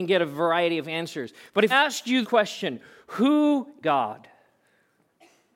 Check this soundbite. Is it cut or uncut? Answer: cut